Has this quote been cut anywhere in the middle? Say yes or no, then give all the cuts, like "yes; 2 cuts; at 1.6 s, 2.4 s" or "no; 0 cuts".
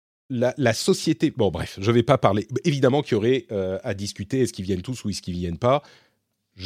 no; 0 cuts